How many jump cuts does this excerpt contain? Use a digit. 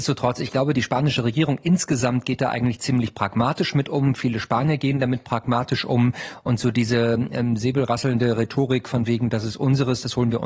0